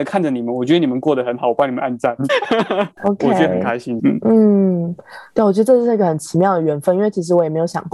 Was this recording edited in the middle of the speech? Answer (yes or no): yes